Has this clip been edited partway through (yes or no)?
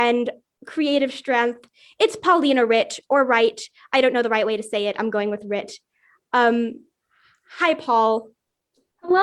no